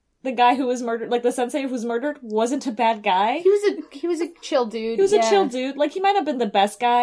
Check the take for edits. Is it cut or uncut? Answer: uncut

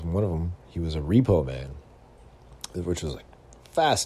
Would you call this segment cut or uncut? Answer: uncut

